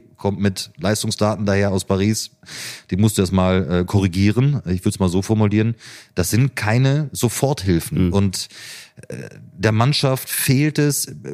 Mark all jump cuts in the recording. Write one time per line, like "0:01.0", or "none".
none